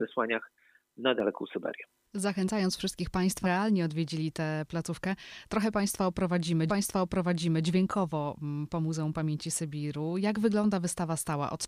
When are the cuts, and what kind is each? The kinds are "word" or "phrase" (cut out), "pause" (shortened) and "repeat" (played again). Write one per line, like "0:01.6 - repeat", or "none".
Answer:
0:03.4 - word
0:06.7 - repeat